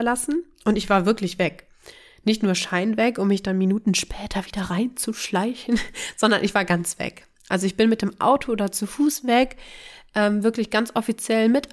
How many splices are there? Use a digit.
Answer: 0